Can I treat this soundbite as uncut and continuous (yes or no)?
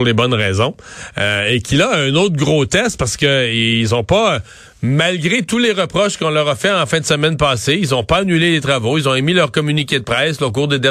yes